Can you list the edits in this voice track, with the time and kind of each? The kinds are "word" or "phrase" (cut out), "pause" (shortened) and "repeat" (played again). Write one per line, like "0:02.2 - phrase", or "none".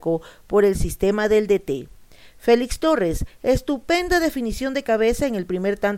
none